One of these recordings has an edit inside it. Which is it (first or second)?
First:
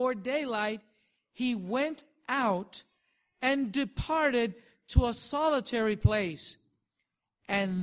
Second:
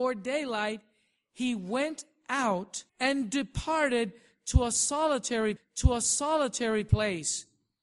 second